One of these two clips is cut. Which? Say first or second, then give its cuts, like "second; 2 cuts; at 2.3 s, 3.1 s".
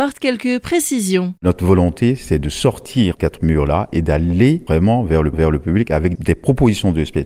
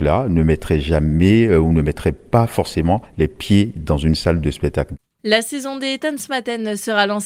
first; 3 cuts; at 1.4 s, 3.2 s, 5.3 s